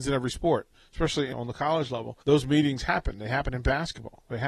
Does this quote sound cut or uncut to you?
cut